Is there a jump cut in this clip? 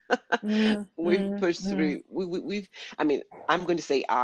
no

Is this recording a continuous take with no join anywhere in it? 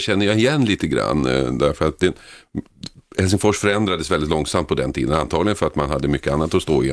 yes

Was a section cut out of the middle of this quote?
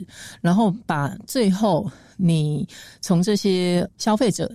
no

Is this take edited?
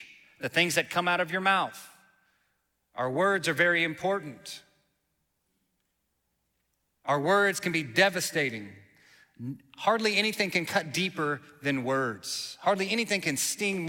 no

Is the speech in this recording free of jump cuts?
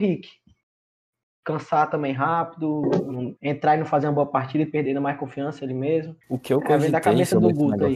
no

